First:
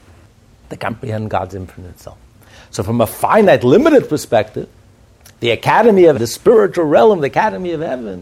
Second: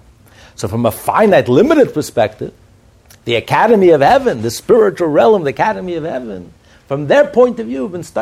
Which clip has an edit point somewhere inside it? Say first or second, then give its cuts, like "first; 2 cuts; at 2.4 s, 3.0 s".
first; 1 cut; at 6.1 s